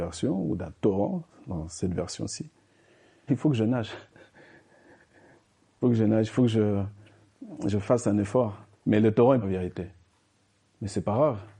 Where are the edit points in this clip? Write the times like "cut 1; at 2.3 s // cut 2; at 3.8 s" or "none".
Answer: cut 1; at 3.3 s // cut 2; at 5.8 s // cut 3; at 8.7 s // cut 4; at 9.4 s